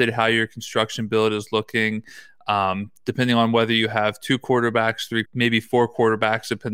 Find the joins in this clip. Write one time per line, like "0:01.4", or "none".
0:05.2